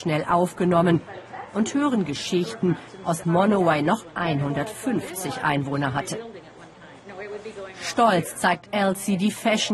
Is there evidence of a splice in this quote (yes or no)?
yes